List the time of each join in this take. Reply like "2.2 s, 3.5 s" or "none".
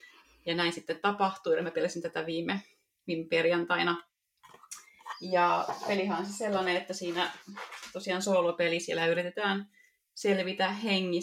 none